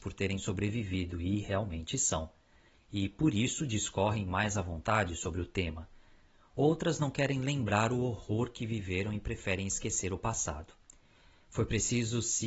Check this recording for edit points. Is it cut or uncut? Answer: uncut